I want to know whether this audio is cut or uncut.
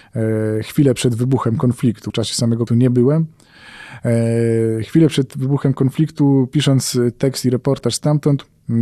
cut